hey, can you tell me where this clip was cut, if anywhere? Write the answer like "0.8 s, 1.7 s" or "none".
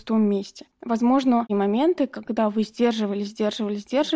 1.5 s